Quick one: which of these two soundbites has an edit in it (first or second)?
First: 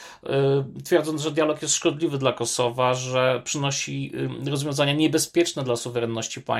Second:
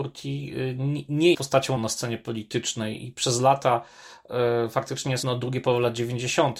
second